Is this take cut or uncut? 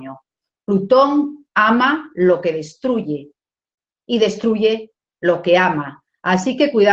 uncut